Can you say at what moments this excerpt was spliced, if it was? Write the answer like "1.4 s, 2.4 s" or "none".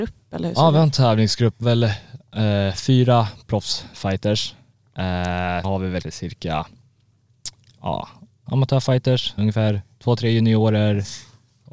1.6 s, 5.6 s, 6.0 s, 8.5 s, 9.4 s